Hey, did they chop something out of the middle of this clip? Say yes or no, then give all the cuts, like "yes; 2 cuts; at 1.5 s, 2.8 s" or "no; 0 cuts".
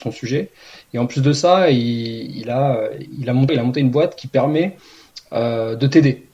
yes; 1 cut; at 3.5 s